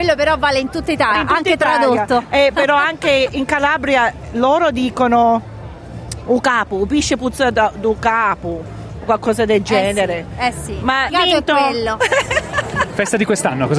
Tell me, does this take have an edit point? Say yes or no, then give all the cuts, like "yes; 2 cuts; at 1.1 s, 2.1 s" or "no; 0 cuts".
yes; 3 cuts; at 1.1 s, 3.3 s, 11.1 s